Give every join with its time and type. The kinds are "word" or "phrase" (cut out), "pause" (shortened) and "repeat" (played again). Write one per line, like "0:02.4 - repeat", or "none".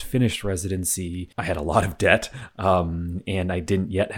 0:01.3 - pause